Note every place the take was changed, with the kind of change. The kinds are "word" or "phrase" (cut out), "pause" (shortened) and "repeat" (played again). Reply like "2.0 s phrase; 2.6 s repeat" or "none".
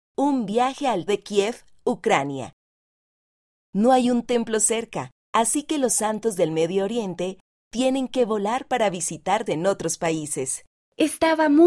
1.1 s word; 5.2 s pause; 9.5 s word; 10.8 s pause